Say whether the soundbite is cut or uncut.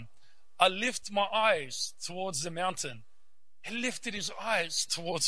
uncut